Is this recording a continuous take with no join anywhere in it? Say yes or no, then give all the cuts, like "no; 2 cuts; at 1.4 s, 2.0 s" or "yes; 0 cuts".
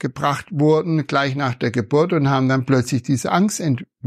yes; 0 cuts